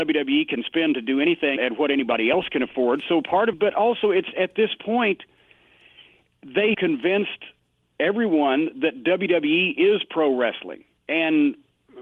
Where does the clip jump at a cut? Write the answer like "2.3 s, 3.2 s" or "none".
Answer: 1.6 s, 3.5 s, 4.3 s, 6.7 s